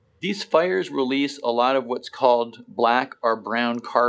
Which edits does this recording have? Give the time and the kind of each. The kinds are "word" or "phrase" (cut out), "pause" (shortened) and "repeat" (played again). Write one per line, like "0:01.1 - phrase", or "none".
none